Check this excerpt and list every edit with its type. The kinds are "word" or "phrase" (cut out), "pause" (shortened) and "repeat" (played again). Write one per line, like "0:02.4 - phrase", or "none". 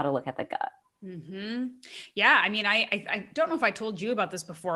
none